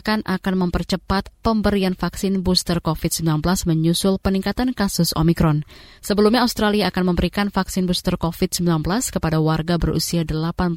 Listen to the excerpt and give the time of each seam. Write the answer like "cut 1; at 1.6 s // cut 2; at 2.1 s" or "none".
none